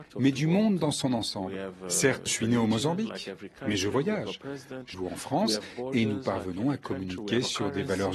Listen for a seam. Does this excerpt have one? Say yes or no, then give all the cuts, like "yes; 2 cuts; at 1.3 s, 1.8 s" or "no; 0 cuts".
yes; 2 cuts; at 2.3 s, 4.9 s